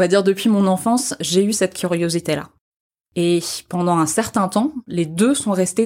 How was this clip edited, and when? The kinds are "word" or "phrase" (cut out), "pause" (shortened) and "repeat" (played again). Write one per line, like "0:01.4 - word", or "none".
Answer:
none

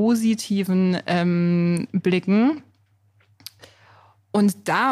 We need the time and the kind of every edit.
none

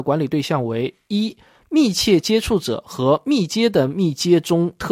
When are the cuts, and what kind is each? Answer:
none

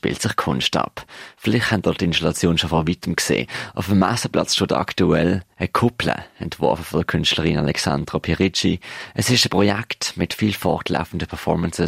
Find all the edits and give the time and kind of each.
none

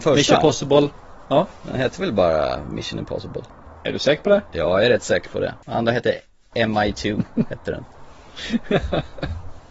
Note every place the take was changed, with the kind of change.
none

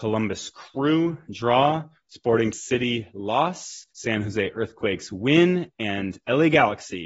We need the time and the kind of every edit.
0:02.5 - word
0:03.9 - pause

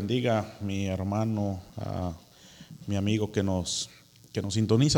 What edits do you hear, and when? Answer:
0:01.7 - pause

